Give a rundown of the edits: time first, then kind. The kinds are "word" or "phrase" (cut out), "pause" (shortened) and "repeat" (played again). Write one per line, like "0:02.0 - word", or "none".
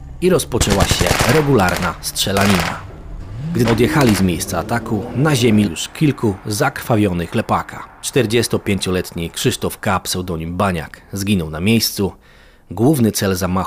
0:03.6 - word
0:05.6 - word
0:07.3 - word
0:08.0 - pause